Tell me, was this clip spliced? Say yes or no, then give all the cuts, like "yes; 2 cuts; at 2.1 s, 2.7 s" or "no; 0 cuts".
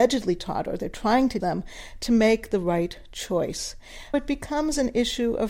yes; 2 cuts; at 1.4 s, 4.1 s